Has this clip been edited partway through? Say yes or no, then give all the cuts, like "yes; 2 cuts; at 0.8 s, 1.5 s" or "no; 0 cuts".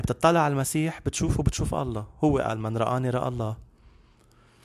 no; 0 cuts